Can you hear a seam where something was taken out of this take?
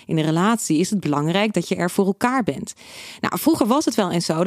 no; 0 cuts

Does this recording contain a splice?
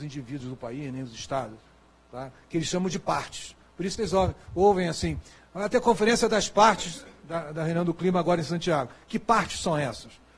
no; 0 cuts

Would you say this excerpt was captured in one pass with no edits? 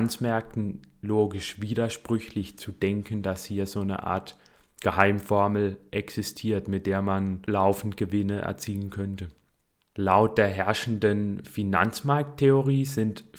yes; 0 cuts

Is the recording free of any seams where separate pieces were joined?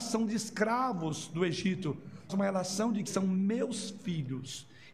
no; 2 cuts; at 2.3 s, 3.1 s

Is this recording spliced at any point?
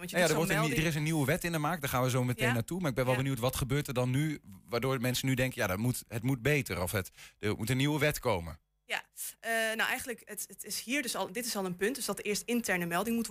no; 0 cuts

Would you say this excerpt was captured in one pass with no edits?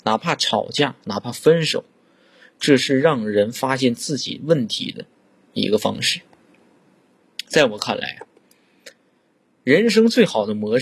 yes; 0 cuts

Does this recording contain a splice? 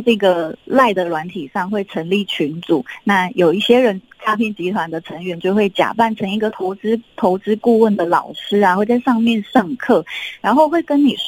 yes; 1 cut; at 7.1 s

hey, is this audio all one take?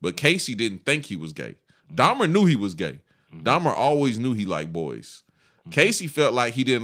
yes; 0 cuts

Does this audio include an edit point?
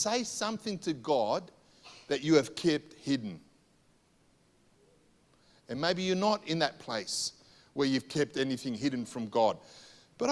no; 0 cuts

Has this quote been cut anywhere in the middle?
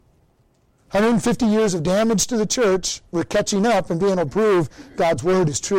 no; 0 cuts

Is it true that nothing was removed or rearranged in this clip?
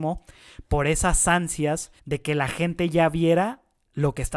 no; 1 cut; at 2.0 s

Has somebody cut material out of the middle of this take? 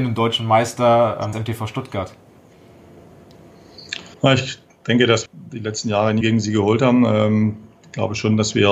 yes; 4 cuts; at 1.3 s, 4.1 s, 5.3 s, 6.2 s

